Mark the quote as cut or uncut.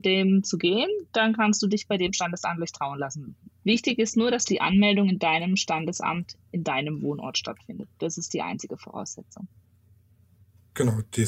cut